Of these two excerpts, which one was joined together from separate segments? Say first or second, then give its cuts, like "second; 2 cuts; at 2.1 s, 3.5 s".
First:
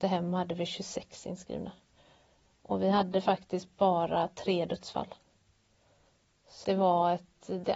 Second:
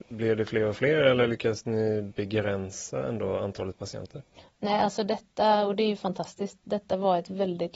first; 1 cut; at 6.6 s